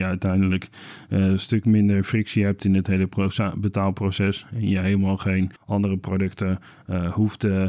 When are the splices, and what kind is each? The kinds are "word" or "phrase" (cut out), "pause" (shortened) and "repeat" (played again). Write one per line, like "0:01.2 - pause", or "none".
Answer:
0:05.6 - pause

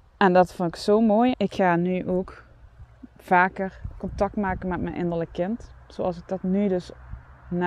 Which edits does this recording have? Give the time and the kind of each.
0:01.3 - phrase

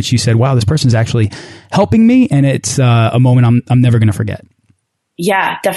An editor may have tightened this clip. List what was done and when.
none

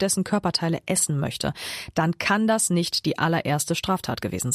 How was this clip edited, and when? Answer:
none

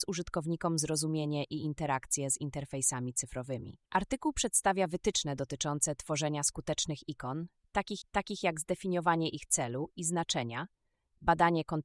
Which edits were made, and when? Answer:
0:03.9 - pause
0:08.0 - repeat

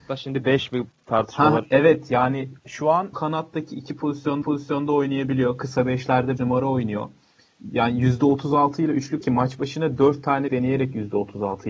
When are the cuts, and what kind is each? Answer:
0:02.6 - pause
0:03.1 - phrase
0:04.4 - repeat
0:06.4 - word
0:09.2 - word
0:10.5 - word

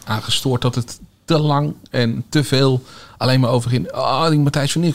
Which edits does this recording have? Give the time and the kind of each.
none

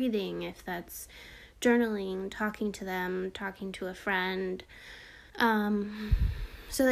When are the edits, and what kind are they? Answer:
0:05.3 - pause

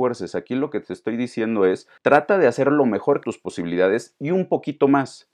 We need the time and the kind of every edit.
0:02.0 - pause
0:03.2 - phrase

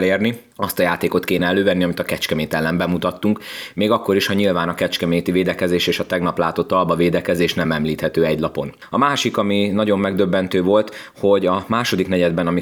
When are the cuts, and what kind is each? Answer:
none

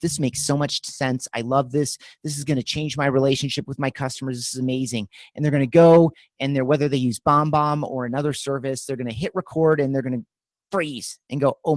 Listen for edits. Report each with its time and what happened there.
none

